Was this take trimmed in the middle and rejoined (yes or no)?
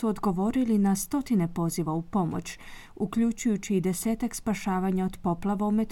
no